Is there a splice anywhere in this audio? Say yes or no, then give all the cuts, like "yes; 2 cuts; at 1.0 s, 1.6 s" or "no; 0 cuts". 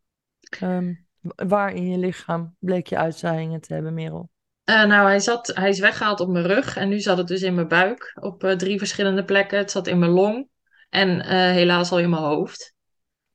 no; 0 cuts